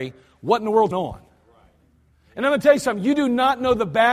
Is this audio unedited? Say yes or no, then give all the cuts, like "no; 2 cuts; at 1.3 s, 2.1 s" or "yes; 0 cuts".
no; 1 cut; at 0.9 s